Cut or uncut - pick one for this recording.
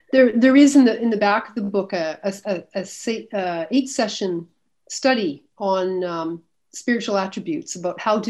uncut